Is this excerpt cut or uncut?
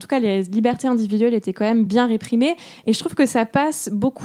uncut